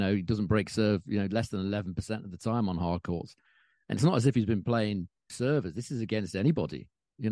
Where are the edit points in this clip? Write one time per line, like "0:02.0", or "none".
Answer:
0:05.3